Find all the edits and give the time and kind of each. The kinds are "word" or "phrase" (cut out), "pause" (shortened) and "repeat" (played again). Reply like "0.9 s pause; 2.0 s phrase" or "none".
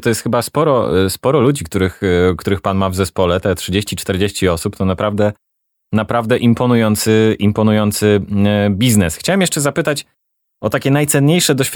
none